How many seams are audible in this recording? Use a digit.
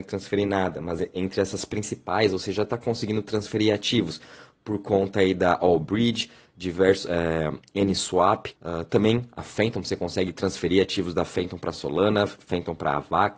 1